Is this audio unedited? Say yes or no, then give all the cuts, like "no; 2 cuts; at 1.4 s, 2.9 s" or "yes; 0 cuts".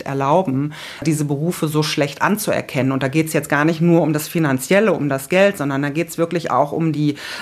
yes; 0 cuts